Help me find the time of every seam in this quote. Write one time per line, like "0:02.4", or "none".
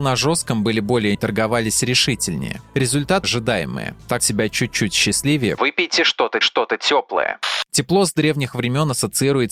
0:01.1
0:03.2
0:04.2
0:05.6
0:06.4